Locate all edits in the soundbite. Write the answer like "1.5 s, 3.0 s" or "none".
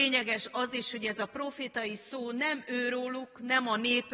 none